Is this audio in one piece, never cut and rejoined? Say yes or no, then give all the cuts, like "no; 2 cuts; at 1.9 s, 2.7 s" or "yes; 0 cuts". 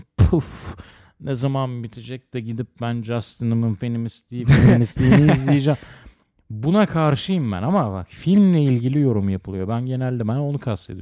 yes; 0 cuts